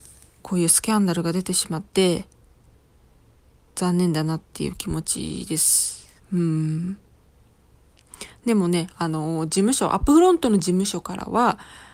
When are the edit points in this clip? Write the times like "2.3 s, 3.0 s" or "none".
6.2 s